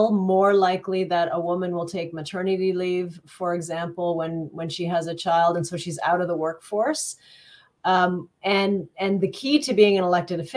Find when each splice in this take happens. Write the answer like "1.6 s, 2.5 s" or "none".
none